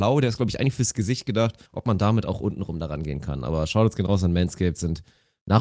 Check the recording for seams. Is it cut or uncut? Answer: cut